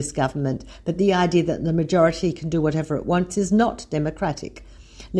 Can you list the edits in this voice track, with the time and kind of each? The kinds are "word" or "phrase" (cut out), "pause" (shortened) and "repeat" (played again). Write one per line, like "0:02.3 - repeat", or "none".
none